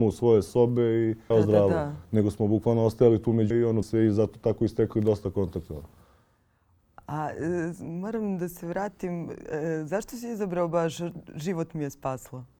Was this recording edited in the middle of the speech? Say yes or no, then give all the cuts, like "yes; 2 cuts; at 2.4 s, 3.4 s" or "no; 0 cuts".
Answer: yes; 3 cuts; at 1.3 s, 3.5 s, 3.8 s